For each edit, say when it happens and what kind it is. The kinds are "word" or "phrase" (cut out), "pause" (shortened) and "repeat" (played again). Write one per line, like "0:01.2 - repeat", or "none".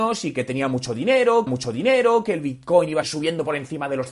0:01.5 - repeat
0:03.0 - word